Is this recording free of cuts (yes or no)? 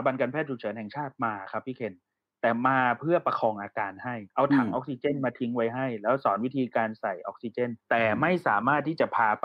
no